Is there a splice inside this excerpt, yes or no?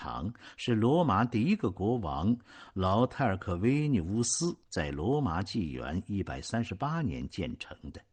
yes